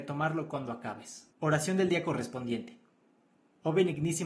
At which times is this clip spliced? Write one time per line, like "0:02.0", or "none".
0:01.3